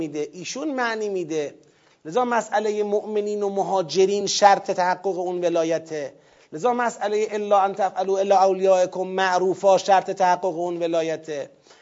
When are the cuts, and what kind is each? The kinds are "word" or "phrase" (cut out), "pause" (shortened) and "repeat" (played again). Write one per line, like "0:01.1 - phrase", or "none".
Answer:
none